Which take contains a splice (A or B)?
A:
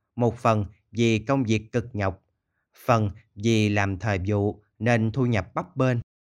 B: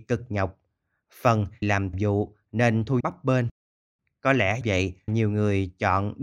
B